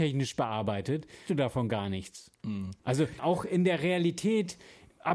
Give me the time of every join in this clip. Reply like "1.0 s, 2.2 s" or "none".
1.3 s, 2.8 s, 3.2 s